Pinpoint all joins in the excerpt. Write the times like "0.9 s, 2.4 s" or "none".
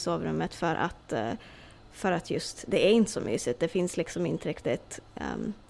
none